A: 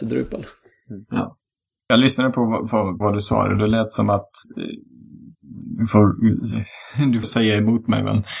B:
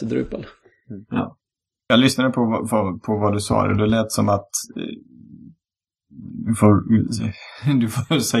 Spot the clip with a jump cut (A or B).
A